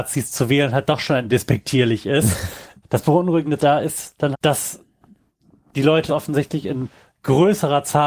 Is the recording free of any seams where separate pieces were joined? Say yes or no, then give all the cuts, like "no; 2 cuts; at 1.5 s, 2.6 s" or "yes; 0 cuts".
no; 5 cuts; at 1.3 s, 2.8 s, 3.6 s, 4.3 s, 6.1 s